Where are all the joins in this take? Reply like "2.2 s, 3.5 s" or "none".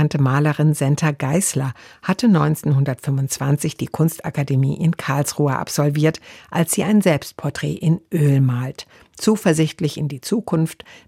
none